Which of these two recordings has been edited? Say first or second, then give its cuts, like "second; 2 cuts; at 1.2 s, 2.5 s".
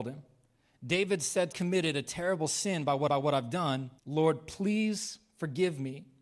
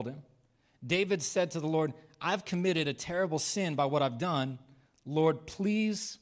first; 3 cuts; at 1.5 s, 3.1 s, 4.0 s